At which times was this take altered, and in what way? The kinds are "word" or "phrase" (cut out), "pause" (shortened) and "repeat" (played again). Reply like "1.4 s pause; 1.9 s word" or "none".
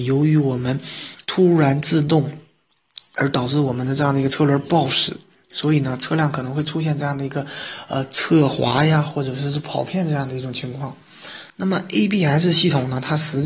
1.2 s pause